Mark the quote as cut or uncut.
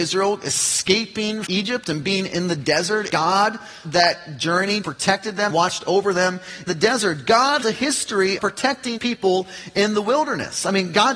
cut